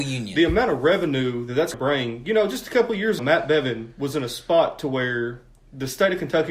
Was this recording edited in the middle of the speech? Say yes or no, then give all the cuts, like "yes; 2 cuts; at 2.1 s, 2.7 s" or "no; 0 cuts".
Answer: yes; 2 cuts; at 1.7 s, 3.2 s